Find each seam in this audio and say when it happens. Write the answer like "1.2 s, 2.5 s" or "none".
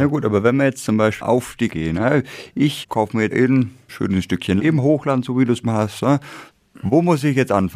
1.2 s, 1.7 s, 2.8 s, 3.3 s, 3.9 s, 4.6 s, 5.6 s